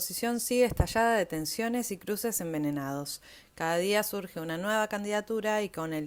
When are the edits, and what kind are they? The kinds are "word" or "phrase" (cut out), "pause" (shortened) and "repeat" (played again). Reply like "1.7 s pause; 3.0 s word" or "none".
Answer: none